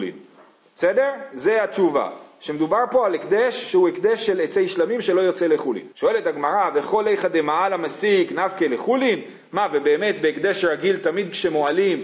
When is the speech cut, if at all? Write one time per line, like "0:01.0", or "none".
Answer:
0:05.9